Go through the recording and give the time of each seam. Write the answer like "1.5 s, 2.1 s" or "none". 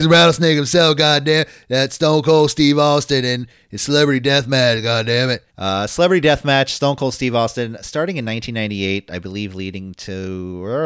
5.5 s